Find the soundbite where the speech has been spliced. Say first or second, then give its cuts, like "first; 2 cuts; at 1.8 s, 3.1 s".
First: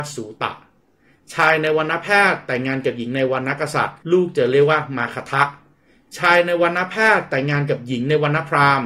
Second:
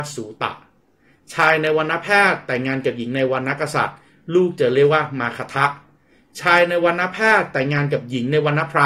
first; 1 cut; at 4.0 s